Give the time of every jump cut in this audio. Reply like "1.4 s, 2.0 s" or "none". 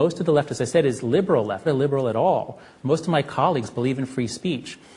1.6 s